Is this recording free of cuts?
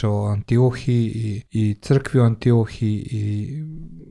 no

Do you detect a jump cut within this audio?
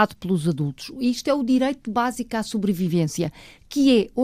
no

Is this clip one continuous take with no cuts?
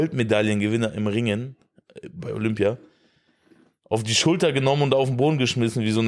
yes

